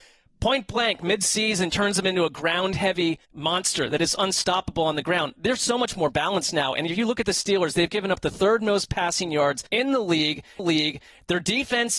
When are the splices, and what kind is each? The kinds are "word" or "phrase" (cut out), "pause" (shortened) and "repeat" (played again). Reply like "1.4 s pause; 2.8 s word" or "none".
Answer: 1.7 s word; 3.2 s pause; 9.7 s pause; 10.6 s repeat